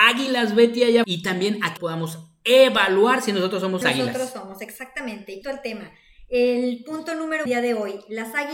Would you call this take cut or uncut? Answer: cut